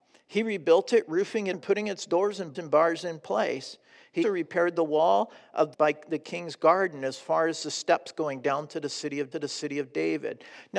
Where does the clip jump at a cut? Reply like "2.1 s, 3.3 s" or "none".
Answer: 1.5 s, 2.5 s, 4.2 s, 5.7 s, 9.3 s